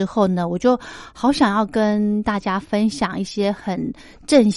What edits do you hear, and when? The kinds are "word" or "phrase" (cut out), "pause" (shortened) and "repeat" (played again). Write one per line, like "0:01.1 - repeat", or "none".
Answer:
none